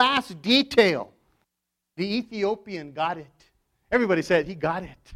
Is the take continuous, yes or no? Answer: no